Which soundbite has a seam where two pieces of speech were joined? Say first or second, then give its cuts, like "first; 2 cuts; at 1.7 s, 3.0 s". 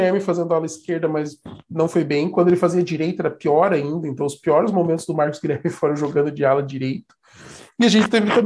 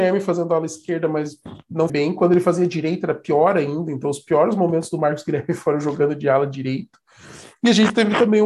second; 1 cut; at 1.9 s